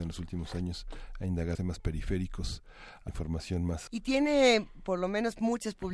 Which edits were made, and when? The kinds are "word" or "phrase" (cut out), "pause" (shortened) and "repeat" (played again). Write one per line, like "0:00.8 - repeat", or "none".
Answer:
0:01.5 - word
0:03.1 - word
0:03.9 - word